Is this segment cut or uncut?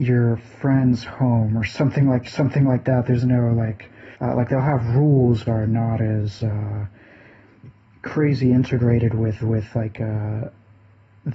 cut